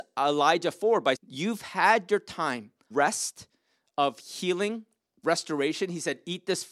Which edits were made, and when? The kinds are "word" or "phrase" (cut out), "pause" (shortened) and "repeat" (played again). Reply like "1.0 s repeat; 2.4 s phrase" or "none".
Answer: 1.2 s word; 2.9 s word; 5.2 s word